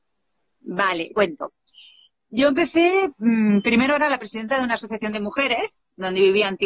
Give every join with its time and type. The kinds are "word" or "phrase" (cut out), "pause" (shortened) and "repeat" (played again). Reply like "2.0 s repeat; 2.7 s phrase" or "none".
1.1 s word